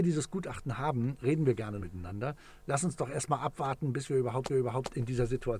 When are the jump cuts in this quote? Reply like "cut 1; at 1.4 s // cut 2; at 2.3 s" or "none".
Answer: cut 1; at 1.2 s // cut 2; at 1.8 s // cut 3; at 4.5 s